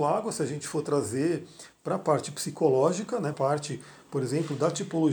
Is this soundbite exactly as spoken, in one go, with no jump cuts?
no; 1 cut; at 3.3 s

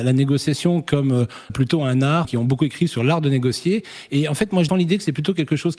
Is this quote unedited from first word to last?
no; 3 cuts; at 1.5 s, 2.2 s, 4.7 s

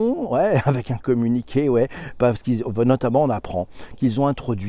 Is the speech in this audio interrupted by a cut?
no; 0 cuts

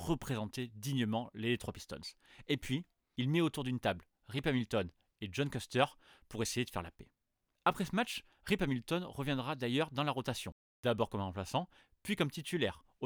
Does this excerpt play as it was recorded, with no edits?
yes; 0 cuts

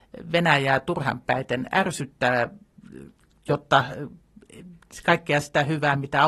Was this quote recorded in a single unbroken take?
yes; 0 cuts

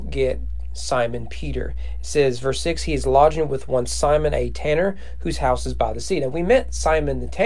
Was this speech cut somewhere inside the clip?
no; 0 cuts

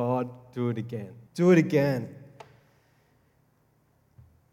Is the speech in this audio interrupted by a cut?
yes; 1 cut; at 1.3 s

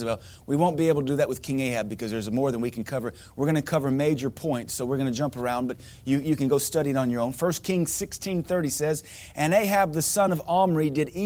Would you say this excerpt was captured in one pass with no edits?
yes; 0 cuts

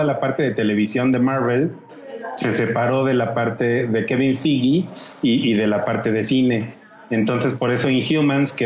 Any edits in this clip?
no; 0 cuts

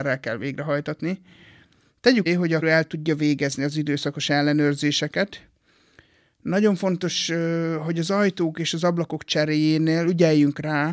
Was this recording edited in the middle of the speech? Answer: yes; 2 cuts; at 2.3 s, 2.6 s

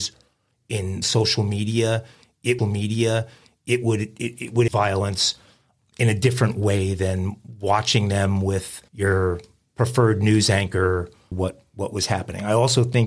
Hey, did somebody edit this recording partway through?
yes; 6 cuts; at 1.0 s, 2.6 s, 4.7 s, 5.8 s, 8.9 s, 11.3 s

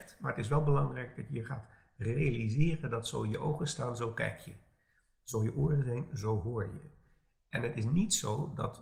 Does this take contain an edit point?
no; 0 cuts

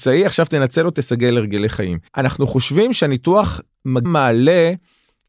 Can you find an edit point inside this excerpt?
yes; 3 cuts; at 0.9 s, 2.1 s, 4.0 s

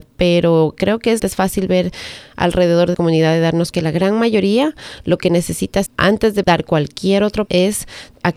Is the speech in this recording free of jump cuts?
no; 6 cuts; at 1.2 s, 2.9 s, 3.7 s, 5.9 s, 6.4 s, 7.5 s

